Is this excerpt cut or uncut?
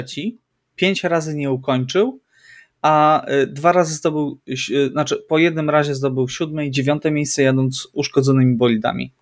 uncut